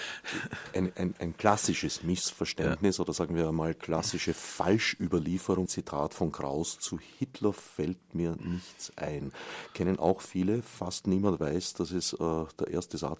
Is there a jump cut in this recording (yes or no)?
yes